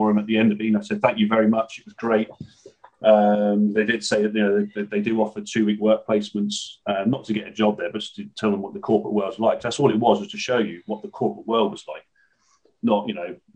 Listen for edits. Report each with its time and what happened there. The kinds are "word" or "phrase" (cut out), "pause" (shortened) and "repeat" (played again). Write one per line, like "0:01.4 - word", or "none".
none